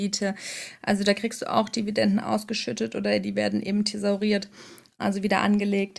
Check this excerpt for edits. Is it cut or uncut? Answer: uncut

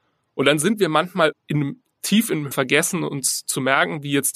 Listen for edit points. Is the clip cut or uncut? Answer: cut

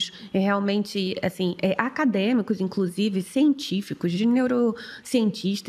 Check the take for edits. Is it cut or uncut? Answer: uncut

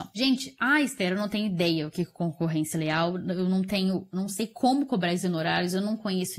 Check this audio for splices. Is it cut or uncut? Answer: uncut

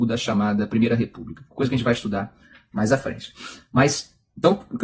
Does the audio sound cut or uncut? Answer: uncut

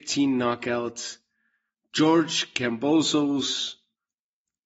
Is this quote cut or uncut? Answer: uncut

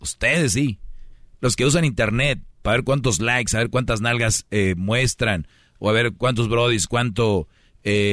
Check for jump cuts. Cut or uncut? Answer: uncut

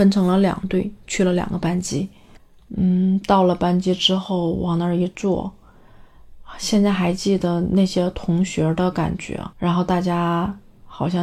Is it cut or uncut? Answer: cut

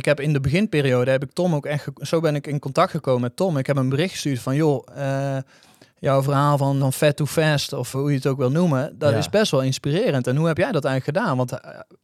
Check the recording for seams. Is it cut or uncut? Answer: cut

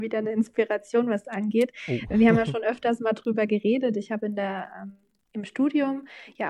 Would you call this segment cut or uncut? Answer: cut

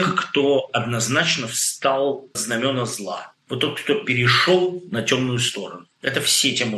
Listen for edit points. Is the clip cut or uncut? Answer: cut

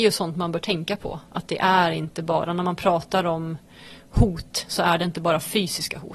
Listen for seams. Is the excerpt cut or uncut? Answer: uncut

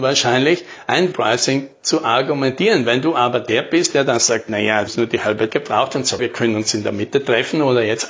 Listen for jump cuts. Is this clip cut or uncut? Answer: cut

